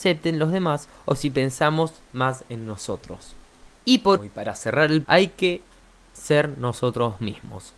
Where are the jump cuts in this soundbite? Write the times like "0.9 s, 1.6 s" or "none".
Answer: 4.2 s, 5.0 s

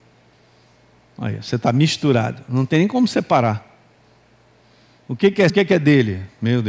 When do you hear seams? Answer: 5.5 s

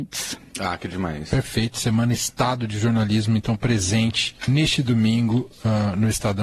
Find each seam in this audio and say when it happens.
4.4 s

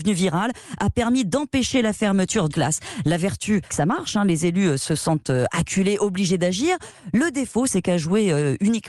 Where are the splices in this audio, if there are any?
2.5 s, 3.7 s

